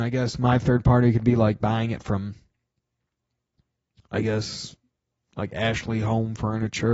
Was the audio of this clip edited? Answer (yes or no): no